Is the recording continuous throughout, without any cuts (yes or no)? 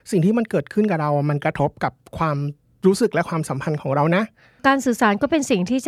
yes